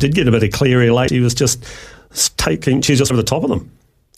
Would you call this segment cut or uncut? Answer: cut